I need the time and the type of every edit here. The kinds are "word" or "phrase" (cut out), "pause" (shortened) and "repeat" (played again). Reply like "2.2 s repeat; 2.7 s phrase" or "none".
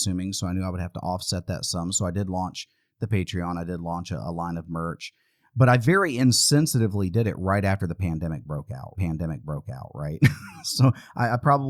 8.9 s repeat